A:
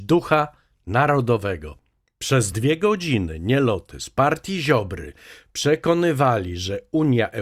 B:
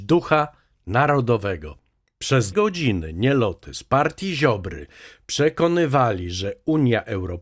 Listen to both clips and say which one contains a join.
B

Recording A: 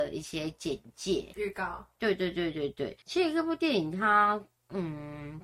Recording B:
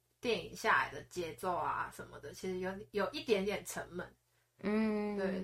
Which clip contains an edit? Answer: A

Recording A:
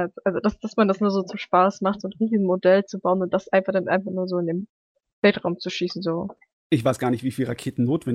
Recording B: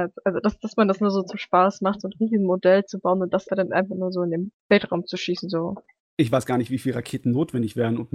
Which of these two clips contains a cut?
B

